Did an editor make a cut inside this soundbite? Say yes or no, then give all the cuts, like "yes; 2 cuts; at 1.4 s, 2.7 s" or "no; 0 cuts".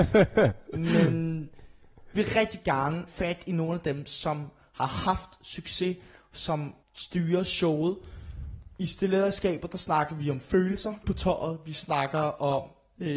yes; 4 cuts; at 2.2 s, 3.1 s, 6.8 s, 11.0 s